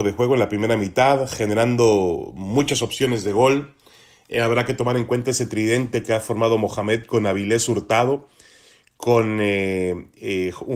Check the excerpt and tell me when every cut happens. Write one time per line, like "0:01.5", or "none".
none